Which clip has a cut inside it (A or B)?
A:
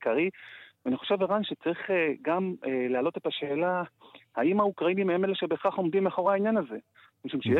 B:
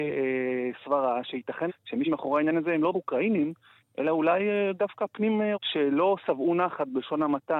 B